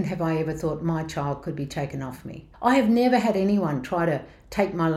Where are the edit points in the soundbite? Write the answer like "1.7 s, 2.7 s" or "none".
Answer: 2.5 s